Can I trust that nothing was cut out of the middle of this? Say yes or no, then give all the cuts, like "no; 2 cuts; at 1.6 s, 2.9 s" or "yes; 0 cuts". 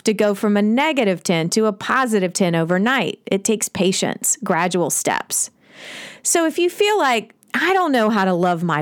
no; 1 cut; at 7.4 s